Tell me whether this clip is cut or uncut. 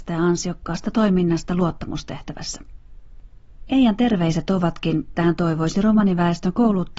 cut